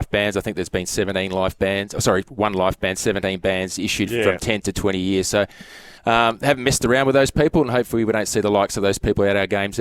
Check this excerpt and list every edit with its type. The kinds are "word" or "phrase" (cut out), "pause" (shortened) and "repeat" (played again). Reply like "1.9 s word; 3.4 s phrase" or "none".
6.0 s pause